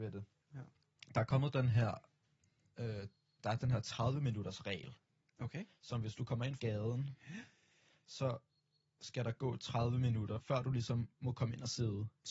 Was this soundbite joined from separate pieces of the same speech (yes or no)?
yes